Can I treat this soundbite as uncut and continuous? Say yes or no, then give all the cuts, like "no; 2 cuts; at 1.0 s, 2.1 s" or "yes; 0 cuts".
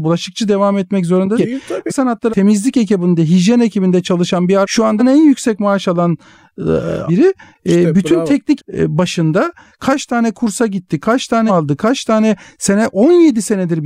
no; 8 cuts; at 1.3 s, 1.9 s, 2.3 s, 4.6 s, 5.0 s, 7.1 s, 8.6 s, 11.5 s